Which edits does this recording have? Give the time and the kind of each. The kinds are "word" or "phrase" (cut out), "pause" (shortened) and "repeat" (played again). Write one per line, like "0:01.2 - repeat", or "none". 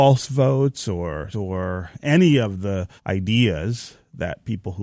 0:01.3 - phrase
0:03.0 - pause